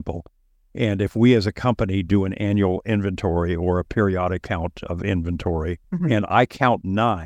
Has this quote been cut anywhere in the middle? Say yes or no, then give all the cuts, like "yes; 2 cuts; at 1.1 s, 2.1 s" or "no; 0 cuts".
yes; 2 cuts; at 4.4 s, 5.8 s